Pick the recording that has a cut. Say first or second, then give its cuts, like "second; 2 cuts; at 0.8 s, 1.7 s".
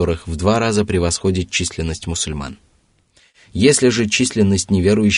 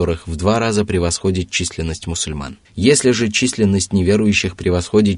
second; 1 cut; at 2.6 s